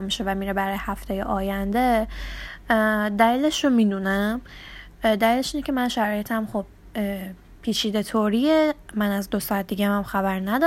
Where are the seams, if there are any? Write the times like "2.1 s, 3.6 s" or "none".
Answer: none